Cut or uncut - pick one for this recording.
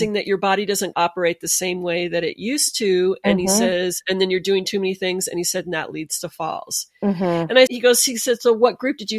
cut